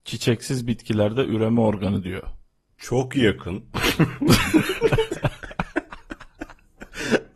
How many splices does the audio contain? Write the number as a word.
zero